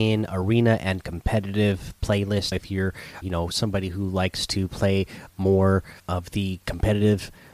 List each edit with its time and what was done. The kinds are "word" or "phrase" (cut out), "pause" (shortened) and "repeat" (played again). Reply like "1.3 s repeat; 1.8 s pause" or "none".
2.5 s word; 3.2 s word; 6.0 s pause